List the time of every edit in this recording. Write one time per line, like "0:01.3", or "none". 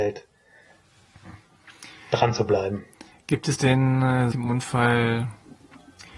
0:04.3